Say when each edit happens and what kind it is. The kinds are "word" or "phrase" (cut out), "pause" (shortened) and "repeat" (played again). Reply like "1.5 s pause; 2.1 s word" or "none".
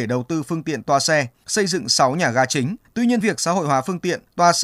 2.8 s pause; 3.2 s phrase